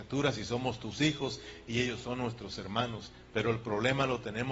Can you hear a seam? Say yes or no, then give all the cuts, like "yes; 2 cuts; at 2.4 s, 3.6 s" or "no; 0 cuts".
no; 0 cuts